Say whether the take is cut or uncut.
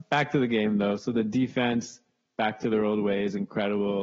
uncut